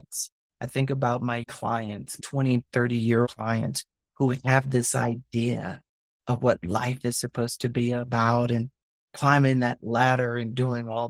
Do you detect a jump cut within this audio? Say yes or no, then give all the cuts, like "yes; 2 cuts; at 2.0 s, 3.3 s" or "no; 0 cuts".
yes; 3 cuts; at 1.5 s, 2.2 s, 3.2 s